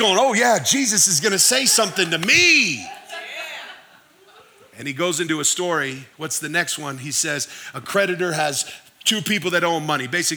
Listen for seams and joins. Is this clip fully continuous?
yes; 0 cuts

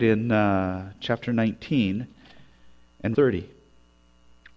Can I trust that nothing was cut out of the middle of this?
no; 2 cuts; at 1.0 s, 3.1 s

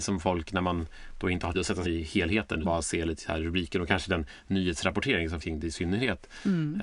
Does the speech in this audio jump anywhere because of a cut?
yes; 4 cuts; at 1.5 s, 1.9 s, 2.6 s, 5.4 s

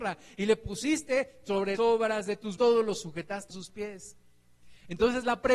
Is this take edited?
yes; 3 cuts; at 1.8 s, 2.6 s, 3.5 s

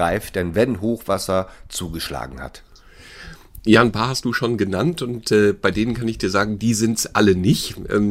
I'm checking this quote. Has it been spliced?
no; 0 cuts

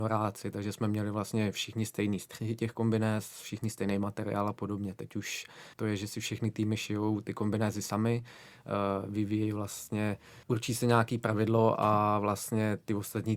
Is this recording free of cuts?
no; 2 cuts; at 5.7 s, 10.4 s

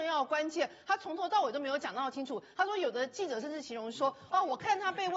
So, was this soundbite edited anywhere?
no; 0 cuts

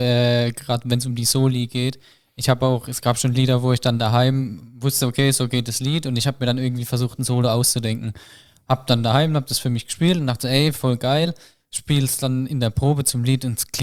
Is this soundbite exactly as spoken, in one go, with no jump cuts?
yes; 0 cuts

